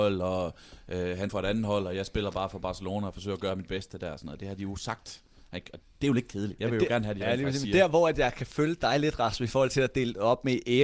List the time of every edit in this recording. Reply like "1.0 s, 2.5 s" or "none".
1.3 s, 5.8 s